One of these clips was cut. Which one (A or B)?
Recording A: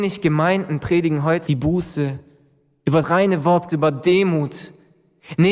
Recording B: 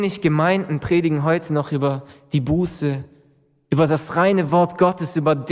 A